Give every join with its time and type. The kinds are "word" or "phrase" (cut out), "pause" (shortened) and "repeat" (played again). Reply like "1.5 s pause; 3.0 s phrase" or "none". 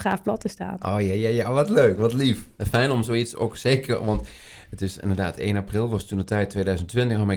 none